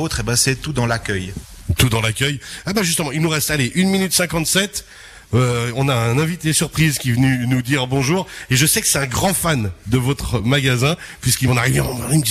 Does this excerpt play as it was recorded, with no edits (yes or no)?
yes